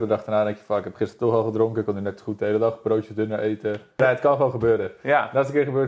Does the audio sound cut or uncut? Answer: uncut